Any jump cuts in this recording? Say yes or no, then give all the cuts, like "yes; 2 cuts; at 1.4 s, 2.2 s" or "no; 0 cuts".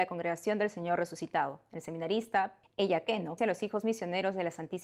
yes; 2 cuts; at 2.6 s, 3.4 s